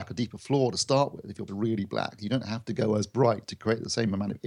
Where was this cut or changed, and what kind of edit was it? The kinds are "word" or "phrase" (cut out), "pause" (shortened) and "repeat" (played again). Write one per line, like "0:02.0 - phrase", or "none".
0:01.5 - word